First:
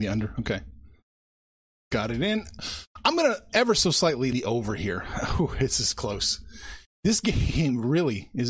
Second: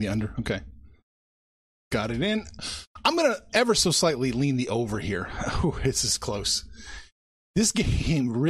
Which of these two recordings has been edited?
first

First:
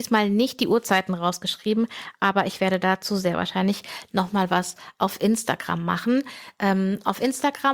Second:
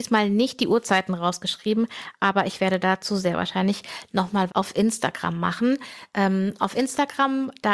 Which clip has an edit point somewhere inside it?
second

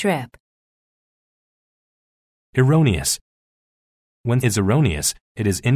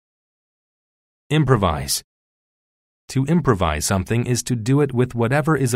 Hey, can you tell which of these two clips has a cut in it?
first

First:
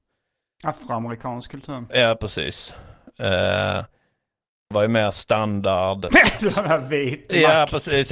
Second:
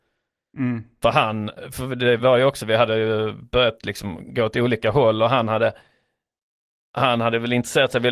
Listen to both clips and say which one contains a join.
first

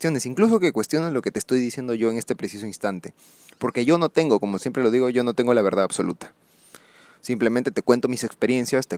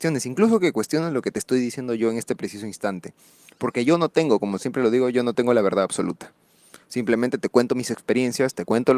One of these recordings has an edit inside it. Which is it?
second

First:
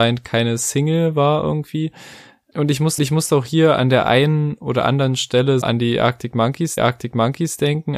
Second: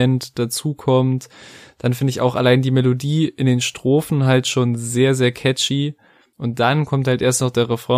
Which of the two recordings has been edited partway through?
first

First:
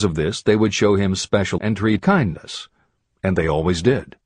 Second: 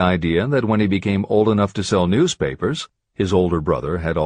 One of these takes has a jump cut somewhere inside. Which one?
first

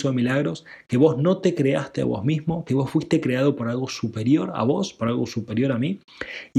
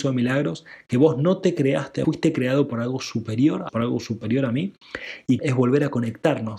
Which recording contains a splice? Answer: second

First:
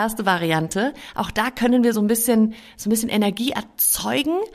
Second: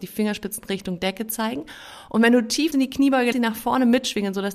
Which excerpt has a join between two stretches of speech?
second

